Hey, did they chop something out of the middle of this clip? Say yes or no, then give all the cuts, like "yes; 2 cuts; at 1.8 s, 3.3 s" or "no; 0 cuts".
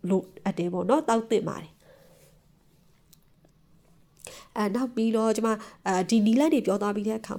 no; 0 cuts